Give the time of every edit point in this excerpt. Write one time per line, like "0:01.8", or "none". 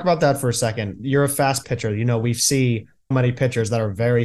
0:01.6
0:03.1